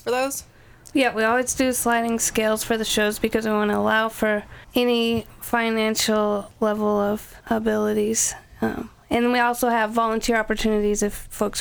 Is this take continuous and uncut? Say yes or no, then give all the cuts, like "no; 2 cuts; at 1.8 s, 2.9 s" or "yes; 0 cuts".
no; 2 cuts; at 4.6 s, 7.4 s